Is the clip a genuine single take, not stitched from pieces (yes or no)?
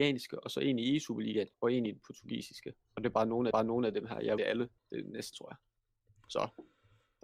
no